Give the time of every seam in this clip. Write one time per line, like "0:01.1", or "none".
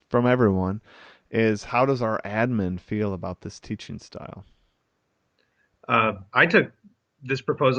none